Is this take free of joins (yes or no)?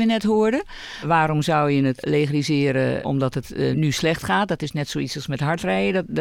yes